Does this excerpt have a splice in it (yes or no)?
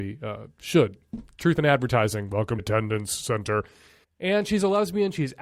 yes